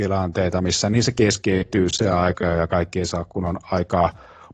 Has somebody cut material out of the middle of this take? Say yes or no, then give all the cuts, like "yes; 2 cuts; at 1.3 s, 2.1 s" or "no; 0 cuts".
no; 0 cuts